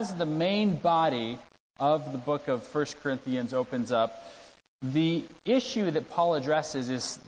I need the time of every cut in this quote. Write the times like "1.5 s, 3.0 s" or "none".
none